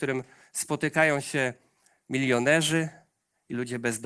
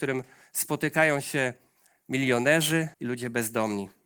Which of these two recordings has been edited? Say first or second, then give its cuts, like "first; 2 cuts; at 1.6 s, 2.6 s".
second; 1 cut; at 2.9 s